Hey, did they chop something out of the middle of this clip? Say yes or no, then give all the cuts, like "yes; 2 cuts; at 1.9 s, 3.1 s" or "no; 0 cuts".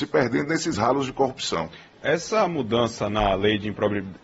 yes; 1 cut; at 2.0 s